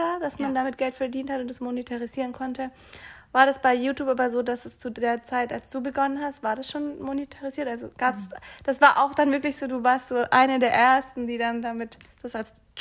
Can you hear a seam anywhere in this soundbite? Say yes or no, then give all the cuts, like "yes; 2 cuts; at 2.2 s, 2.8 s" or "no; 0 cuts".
no; 0 cuts